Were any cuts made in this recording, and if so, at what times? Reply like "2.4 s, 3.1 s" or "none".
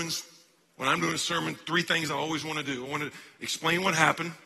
none